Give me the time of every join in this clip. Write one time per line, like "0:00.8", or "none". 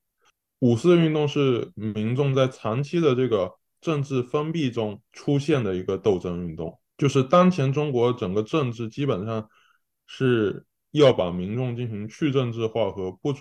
0:05.1
0:06.9